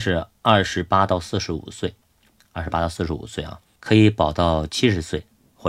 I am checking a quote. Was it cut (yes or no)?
no